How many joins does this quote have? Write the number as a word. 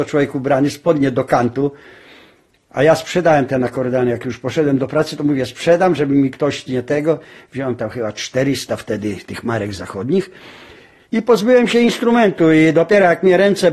zero